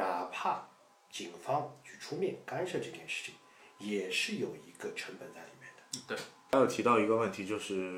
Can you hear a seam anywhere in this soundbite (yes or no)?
no